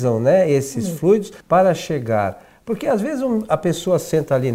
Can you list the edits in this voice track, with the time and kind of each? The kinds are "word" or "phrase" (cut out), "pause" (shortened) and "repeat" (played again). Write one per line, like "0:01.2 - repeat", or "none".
0:01.4 - pause